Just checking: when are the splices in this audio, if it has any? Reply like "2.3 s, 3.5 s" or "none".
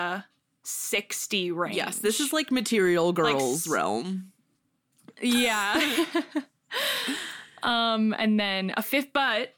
none